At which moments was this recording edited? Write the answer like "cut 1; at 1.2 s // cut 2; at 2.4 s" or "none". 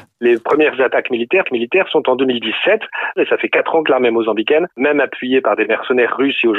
cut 1; at 1.4 s

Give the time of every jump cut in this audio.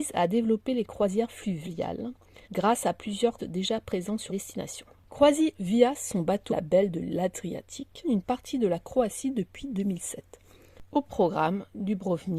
cut 1; at 2.4 s // cut 2; at 3.4 s // cut 3; at 4.3 s // cut 4; at 5.5 s // cut 5; at 6.5 s // cut 6; at 8.0 s

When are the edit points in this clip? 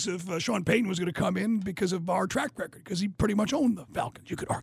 none

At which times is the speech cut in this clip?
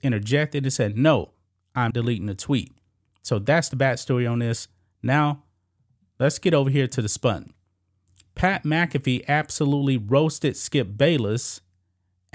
cut 1; at 1.9 s

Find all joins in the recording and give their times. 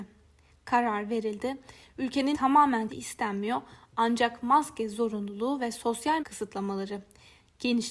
cut 1; at 2.3 s // cut 2; at 2.9 s // cut 3; at 6.2 s

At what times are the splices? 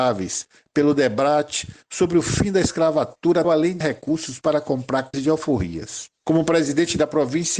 cut 1; at 3.4 s // cut 2; at 3.8 s // cut 3; at 5.1 s // cut 4; at 6.2 s

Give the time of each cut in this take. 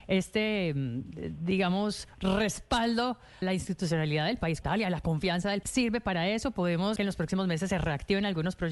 cut 1; at 3.4 s // cut 2; at 4.6 s // cut 3; at 5.6 s // cut 4; at 7.0 s

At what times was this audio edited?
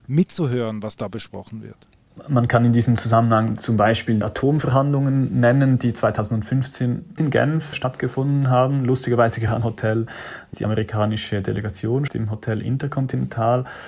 cut 1; at 4.2 s // cut 2; at 7.2 s // cut 3; at 7.7 s // cut 4; at 9.6 s // cut 5; at 10.5 s // cut 6; at 12.1 s

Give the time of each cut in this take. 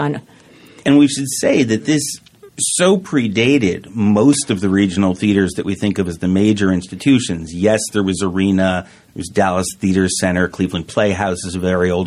cut 1; at 2.5 s

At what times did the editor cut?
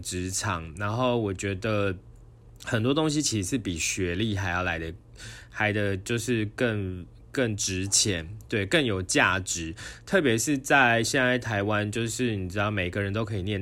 none

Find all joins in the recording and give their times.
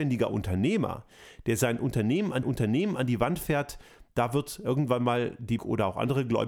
cut 1; at 2.4 s // cut 2; at 5.6 s

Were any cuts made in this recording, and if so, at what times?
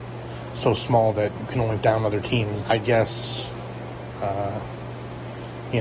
cut 1; at 1.5 s // cut 2; at 1.8 s // cut 3; at 2.6 s

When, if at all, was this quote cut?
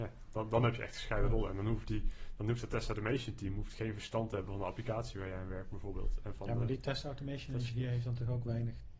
none

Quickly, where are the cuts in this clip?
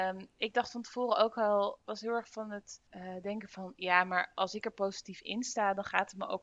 cut 1; at 1.8 s // cut 2; at 2.9 s

